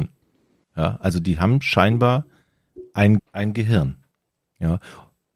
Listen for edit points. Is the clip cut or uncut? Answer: cut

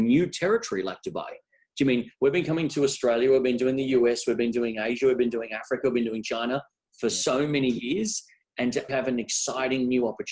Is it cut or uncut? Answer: cut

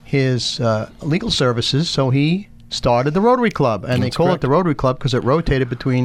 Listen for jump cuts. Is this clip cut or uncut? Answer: uncut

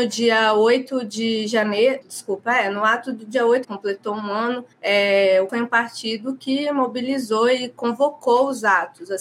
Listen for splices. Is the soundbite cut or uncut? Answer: cut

